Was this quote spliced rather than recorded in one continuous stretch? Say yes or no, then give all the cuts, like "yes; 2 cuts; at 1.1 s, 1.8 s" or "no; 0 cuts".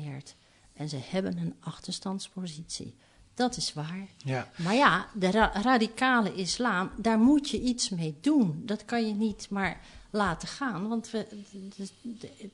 no; 0 cuts